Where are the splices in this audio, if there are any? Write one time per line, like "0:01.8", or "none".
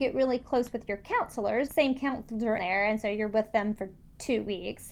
0:01.7
0:02.6